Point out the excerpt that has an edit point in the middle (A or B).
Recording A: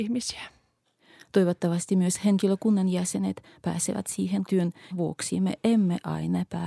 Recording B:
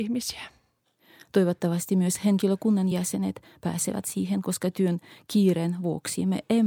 A